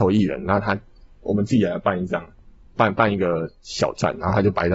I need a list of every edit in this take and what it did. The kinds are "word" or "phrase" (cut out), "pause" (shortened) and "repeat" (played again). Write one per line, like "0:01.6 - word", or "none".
none

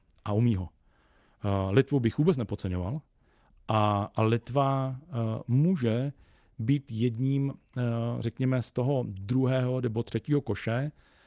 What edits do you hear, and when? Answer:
none

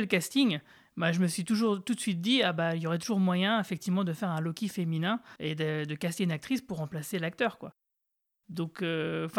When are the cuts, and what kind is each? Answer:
0:05.4 - pause

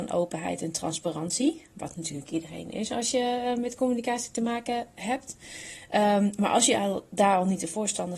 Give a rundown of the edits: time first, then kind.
none

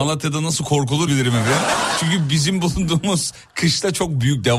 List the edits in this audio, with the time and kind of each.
0:01.1 - word

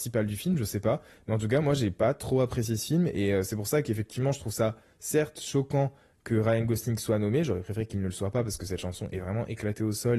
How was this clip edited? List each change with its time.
none

